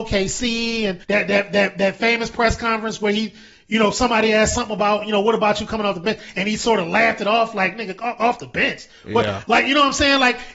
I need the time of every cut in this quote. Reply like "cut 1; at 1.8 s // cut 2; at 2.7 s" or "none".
cut 1; at 1.0 s